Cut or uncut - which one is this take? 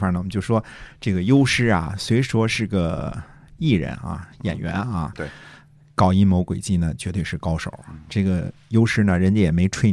uncut